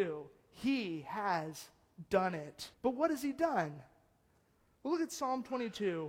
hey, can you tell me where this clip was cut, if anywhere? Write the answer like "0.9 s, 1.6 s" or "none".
2.7 s

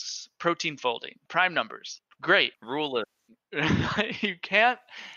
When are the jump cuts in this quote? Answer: 1.3 s, 2.5 s

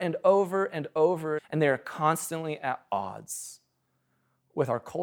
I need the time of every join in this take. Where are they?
1.4 s

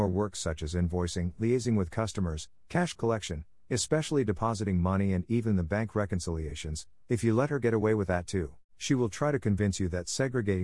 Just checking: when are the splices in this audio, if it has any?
8.7 s

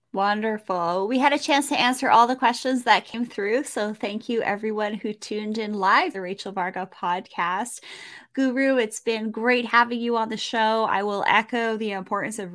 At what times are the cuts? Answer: 6.1 s

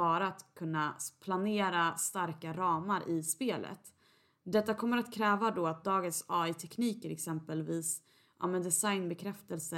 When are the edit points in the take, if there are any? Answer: none

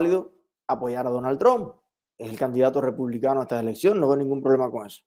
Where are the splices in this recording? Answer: none

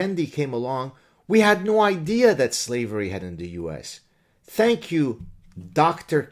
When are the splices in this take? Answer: 3.2 s

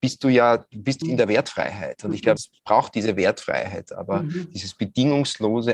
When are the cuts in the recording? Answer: 1.0 s, 2.4 s

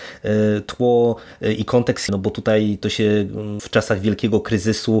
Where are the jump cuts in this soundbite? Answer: 2.1 s, 3.6 s

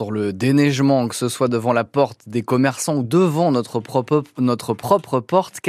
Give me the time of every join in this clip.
none

